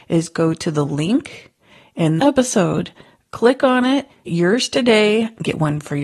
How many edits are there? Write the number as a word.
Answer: two